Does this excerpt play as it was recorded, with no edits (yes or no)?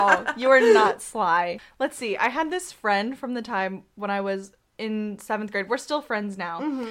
yes